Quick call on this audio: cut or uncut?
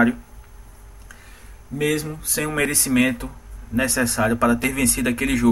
uncut